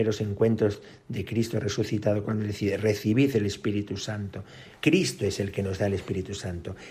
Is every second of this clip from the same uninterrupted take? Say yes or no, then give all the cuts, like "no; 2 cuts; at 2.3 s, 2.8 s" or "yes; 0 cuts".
no; 2 cuts; at 2.2 s, 4.8 s